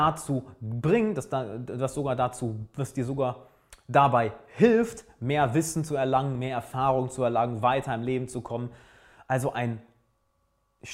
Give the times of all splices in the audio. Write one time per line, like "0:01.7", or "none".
none